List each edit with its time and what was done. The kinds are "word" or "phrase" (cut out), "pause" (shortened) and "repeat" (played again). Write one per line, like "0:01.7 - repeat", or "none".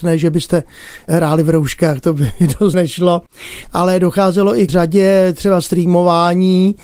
0:02.7 - word
0:04.7 - phrase